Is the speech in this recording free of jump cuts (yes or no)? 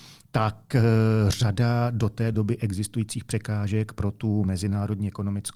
yes